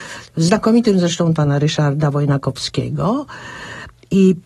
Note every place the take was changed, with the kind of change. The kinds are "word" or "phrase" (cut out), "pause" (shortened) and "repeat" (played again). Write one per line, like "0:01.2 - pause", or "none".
0:01.4 - word